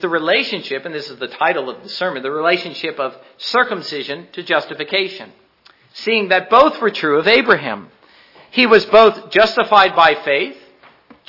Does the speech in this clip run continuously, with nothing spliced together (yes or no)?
no